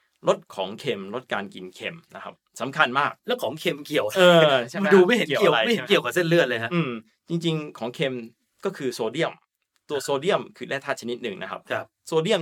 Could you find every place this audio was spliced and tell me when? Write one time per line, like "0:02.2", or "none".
0:03.2